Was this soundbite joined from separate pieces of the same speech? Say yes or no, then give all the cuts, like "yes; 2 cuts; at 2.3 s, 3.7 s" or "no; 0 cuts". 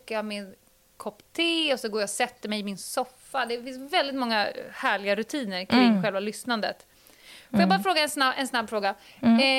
no; 0 cuts